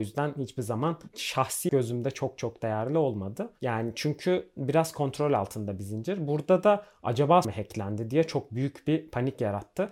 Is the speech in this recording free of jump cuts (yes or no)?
no